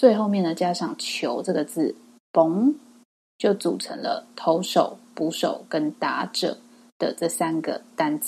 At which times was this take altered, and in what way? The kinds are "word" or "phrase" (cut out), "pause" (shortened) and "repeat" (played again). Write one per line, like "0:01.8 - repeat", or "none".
none